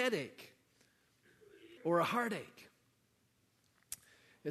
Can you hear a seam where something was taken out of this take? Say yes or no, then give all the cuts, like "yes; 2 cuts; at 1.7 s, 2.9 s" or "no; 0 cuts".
yes; 1 cut; at 1.8 s